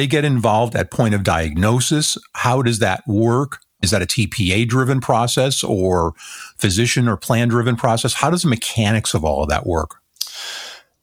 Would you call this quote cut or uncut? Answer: uncut